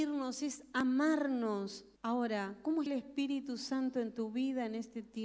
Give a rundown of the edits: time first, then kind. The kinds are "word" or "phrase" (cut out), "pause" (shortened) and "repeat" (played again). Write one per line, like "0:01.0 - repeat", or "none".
0:02.0 - pause
0:02.9 - word

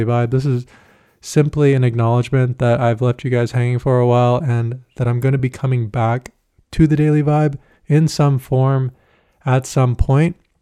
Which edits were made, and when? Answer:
none

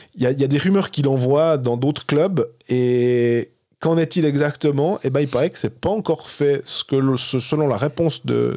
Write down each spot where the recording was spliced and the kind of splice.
none

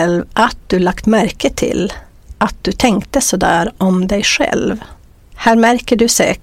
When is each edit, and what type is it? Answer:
none

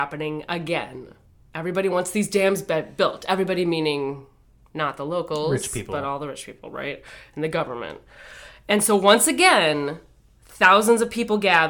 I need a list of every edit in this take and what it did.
none

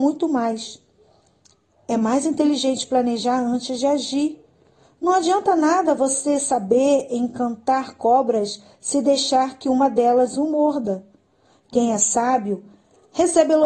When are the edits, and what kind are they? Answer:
none

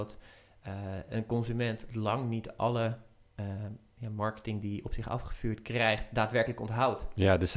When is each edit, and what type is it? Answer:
none

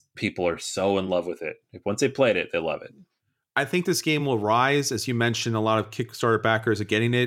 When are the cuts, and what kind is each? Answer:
none

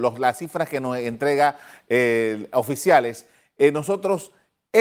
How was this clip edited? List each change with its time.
none

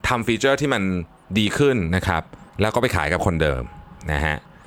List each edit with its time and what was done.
0:02.5 - pause

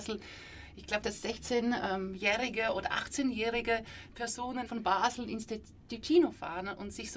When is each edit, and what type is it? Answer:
0:01.0 - word
0:04.7 - word

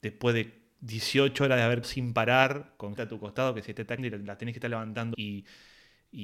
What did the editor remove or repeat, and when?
0:01.8 - word
0:03.0 - word
0:04.0 - word
0:05.1 - word

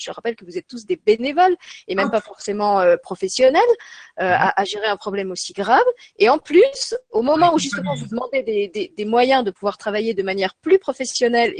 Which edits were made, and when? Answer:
none

